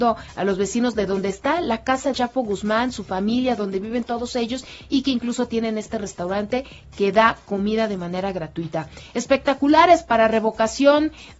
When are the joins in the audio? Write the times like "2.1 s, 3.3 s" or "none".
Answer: 2.1 s